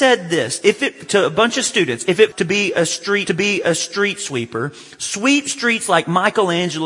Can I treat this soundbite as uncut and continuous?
no; 2 cuts; at 2.3 s, 3.3 s

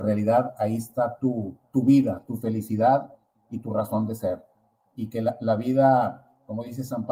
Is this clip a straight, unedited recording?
yes; 0 cuts

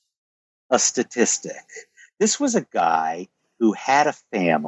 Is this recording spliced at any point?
no; 0 cuts

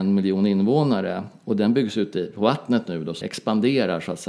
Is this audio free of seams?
no; 1 cut; at 3.2 s

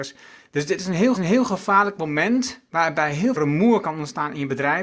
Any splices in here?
yes; 3 cuts; at 1.1 s, 2.6 s, 3.4 s

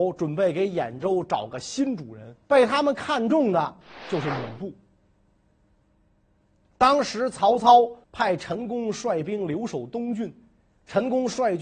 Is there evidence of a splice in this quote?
yes; 2 cuts; at 2.4 s, 8.0 s

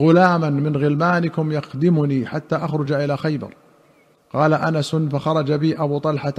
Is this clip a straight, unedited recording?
yes; 0 cuts

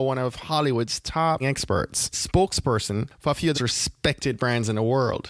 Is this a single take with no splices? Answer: no; 3 cuts; at 1.4 s, 2.1 s, 3.5 s

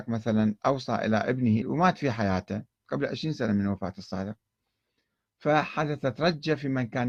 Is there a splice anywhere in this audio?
yes; 1 cut; at 1.6 s

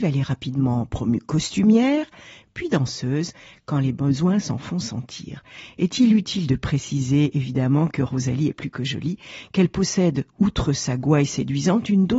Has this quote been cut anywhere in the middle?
no; 0 cuts

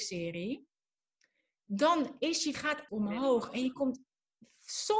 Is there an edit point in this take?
yes; 2 cuts; at 2.5 s, 2.9 s

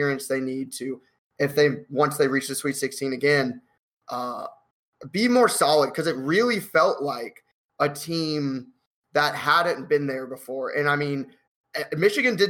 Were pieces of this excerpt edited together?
no; 0 cuts

